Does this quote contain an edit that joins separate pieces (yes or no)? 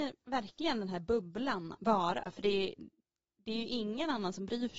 yes